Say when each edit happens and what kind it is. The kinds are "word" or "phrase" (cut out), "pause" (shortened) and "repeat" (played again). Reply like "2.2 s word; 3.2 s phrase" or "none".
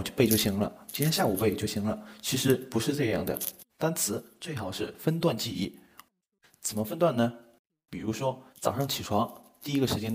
3.7 s pause; 8.5 s pause